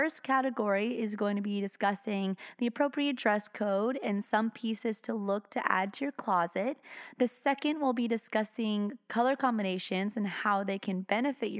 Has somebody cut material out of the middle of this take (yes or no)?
no